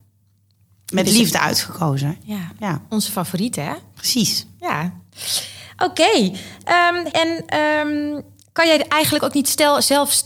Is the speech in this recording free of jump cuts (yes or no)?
no